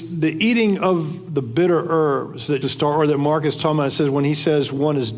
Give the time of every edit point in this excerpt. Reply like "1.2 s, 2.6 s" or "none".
2.6 s